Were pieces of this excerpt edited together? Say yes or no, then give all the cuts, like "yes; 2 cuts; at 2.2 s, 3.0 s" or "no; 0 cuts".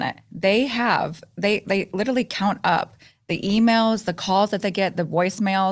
no; 0 cuts